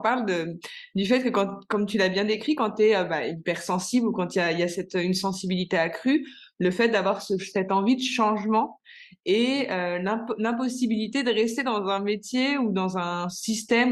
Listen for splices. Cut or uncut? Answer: uncut